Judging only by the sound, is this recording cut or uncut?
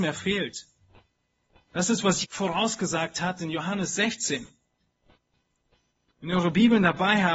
cut